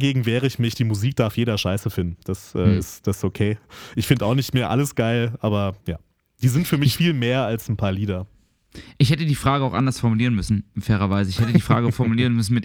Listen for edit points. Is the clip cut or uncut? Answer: cut